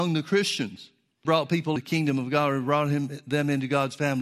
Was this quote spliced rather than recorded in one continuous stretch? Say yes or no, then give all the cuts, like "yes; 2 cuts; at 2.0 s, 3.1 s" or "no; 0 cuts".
yes; 2 cuts; at 1.2 s, 1.8 s